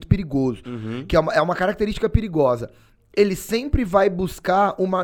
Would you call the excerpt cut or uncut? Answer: uncut